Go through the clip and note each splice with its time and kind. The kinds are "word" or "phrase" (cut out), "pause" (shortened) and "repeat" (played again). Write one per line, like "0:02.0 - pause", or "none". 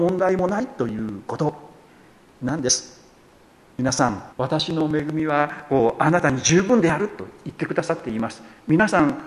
0:04.3 - pause